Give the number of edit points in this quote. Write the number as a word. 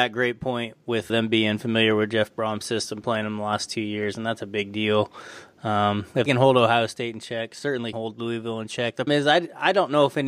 four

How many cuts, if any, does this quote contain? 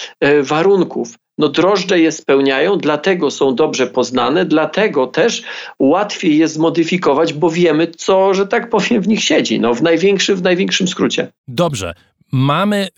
one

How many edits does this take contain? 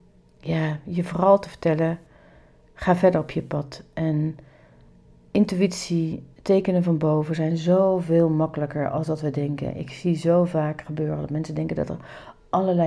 zero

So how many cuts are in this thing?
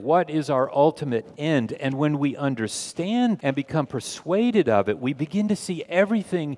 one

